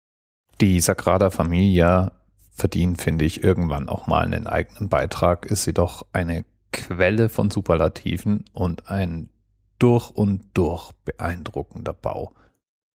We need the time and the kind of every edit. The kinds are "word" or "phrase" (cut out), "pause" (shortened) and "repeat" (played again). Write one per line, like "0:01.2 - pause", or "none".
none